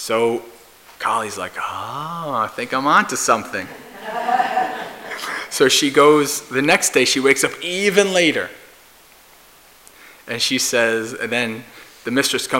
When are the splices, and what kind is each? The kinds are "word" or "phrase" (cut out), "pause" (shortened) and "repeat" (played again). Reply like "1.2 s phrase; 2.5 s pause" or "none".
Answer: 0.9 s pause